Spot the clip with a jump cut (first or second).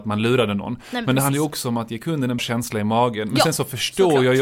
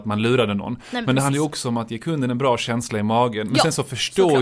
first